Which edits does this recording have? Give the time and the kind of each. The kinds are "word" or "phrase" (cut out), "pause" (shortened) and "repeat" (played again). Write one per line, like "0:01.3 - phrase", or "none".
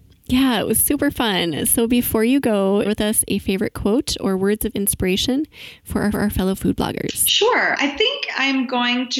0:02.8 - word
0:06.1 - repeat